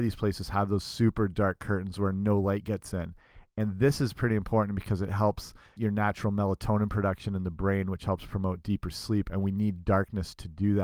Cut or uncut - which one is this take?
cut